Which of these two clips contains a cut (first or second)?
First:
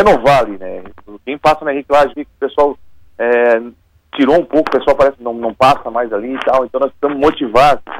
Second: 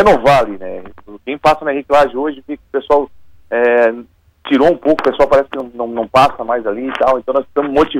first